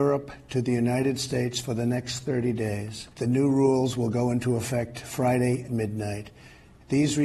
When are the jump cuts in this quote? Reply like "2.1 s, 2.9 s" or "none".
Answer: 3.1 s, 5.7 s